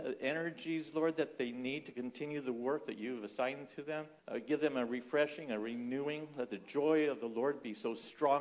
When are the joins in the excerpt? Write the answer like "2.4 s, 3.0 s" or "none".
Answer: 4.2 s